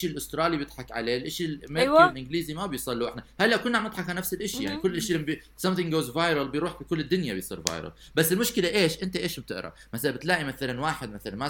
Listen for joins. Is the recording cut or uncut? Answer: uncut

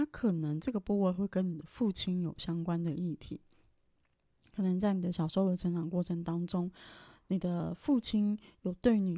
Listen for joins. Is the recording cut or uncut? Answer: uncut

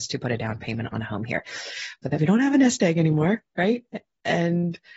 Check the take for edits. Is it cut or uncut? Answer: cut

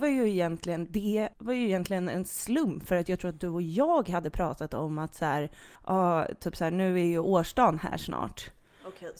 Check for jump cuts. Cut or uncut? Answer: cut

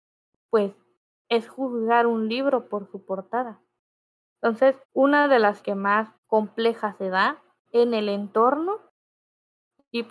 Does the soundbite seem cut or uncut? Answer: cut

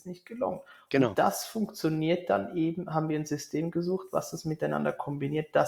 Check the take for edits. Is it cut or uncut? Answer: uncut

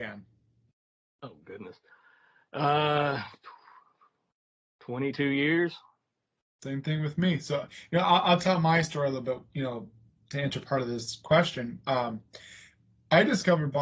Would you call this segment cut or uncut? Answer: uncut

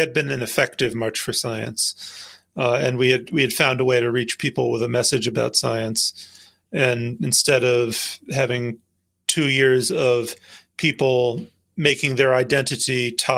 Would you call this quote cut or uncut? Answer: uncut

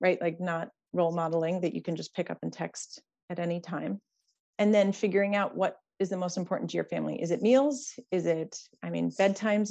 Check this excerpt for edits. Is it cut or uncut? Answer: uncut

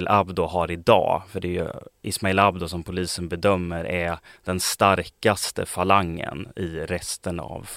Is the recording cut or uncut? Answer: uncut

